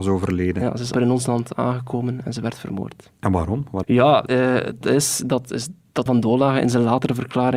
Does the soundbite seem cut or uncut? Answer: cut